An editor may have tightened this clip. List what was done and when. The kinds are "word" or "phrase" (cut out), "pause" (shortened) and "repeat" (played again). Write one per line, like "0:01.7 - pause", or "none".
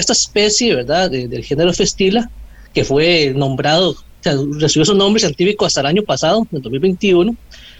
none